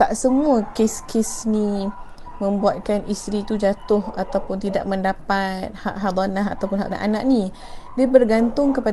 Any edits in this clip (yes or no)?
yes